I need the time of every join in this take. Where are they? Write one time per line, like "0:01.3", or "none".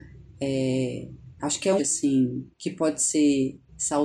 0:01.3
0:01.8
0:02.5